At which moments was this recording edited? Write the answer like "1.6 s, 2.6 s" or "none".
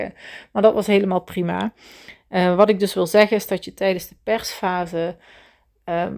none